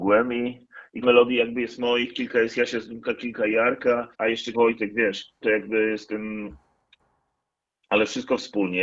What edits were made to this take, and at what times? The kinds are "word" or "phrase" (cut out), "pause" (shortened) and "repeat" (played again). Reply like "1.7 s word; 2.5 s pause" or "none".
1.0 s word; 4.1 s pause; 4.5 s phrase; 5.4 s word